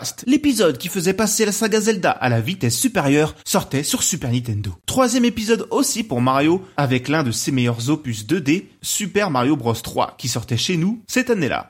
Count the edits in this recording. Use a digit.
1